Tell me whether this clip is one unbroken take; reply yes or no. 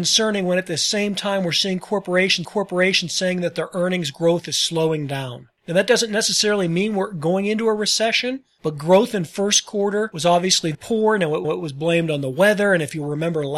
no